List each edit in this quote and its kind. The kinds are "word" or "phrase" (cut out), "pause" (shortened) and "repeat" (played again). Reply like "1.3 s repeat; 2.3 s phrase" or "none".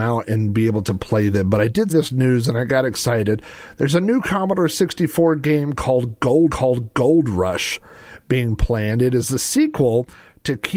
1.9 s word; 6.5 s repeat